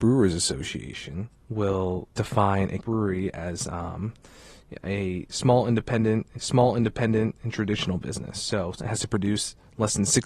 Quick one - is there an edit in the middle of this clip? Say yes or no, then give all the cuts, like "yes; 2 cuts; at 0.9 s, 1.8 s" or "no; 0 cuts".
yes; 4 cuts; at 2.1 s, 2.8 s, 6.3 s, 8.8 s